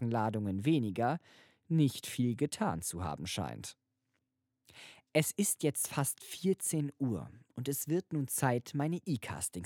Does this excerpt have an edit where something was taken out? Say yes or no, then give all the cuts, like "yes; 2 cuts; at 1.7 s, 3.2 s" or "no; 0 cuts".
no; 0 cuts